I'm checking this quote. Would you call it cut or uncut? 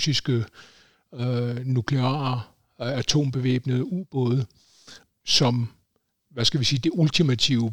uncut